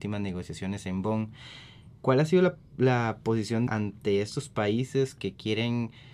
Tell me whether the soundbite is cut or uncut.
cut